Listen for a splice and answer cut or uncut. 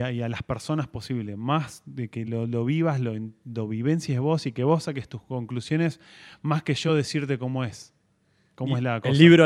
uncut